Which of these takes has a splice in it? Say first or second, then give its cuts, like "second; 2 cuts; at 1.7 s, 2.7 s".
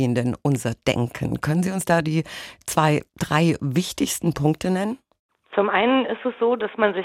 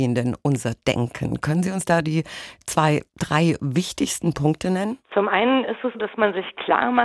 second; 2 cuts; at 5.0 s, 5.9 s